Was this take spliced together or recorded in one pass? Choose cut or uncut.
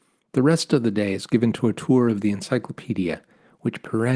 uncut